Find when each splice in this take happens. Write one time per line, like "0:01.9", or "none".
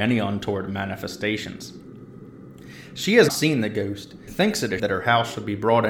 0:03.3
0:04.3
0:04.8